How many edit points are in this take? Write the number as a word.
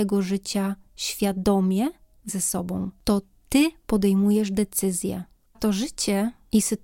three